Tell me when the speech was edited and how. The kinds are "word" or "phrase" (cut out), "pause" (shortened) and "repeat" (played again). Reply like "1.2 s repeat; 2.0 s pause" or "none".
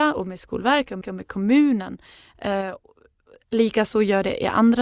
1.0 s repeat